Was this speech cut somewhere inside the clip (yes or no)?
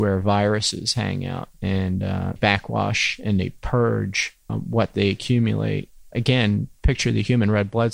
yes